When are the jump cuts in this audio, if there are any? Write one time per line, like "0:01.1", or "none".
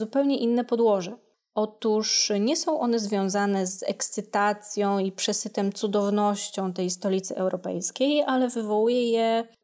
none